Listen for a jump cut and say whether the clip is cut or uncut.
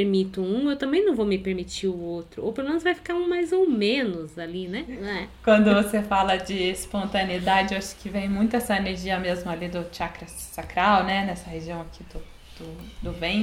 uncut